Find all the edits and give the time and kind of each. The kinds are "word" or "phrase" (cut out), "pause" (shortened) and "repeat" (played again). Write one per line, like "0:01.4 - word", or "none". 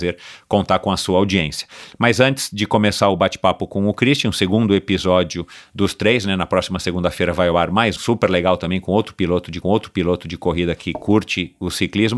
0:08.0 - word
0:09.6 - repeat